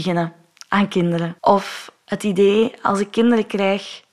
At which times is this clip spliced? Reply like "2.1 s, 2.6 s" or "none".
1.4 s

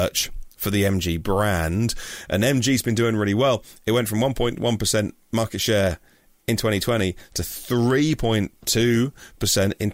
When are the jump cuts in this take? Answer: none

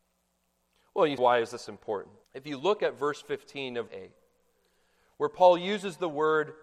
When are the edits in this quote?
1.2 s, 2.2 s, 3.9 s

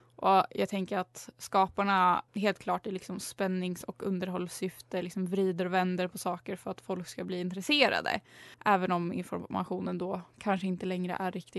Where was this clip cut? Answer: 2.3 s, 8.5 s

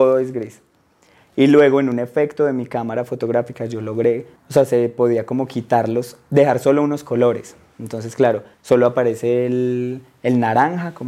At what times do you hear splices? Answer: 4.4 s, 8.5 s

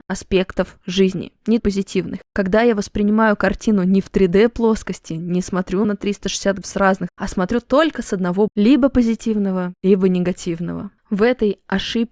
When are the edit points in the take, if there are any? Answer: 1.6 s, 5.8 s, 6.6 s, 7.1 s, 8.5 s

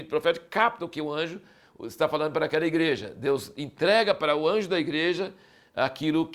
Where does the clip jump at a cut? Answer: none

